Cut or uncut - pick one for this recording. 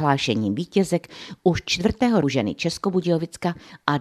cut